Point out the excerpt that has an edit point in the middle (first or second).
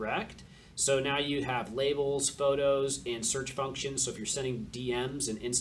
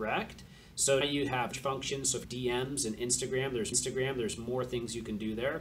second